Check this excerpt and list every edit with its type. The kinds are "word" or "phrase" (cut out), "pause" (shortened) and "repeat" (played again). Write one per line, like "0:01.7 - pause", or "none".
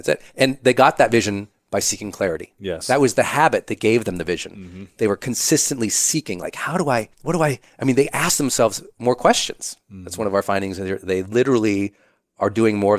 0:07.1 - pause